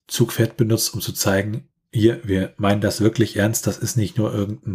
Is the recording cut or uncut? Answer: uncut